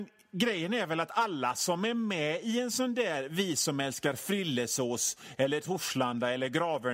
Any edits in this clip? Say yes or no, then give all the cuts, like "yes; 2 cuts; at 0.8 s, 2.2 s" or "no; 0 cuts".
no; 0 cuts